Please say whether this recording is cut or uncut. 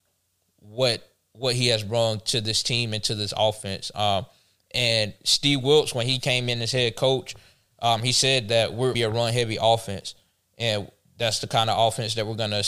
cut